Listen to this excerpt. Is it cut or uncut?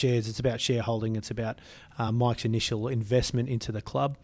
uncut